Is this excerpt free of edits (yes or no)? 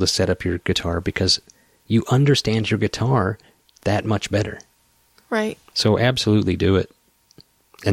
no